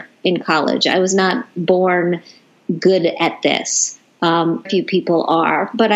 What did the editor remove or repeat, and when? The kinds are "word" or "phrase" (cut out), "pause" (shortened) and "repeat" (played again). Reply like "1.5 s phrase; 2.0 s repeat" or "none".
4.7 s word